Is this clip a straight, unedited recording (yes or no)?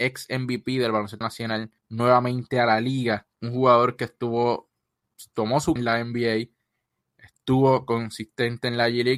no